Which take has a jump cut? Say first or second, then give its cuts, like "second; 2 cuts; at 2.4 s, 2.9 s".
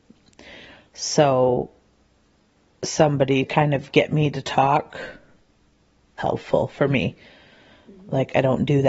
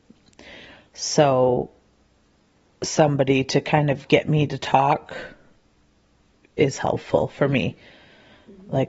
first; 2 cuts; at 3.4 s, 6.2 s